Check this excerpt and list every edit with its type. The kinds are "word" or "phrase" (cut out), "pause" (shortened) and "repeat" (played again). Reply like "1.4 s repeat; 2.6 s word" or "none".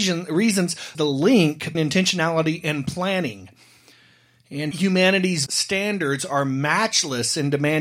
0.9 s phrase; 1.7 s word; 4.7 s word; 5.5 s phrase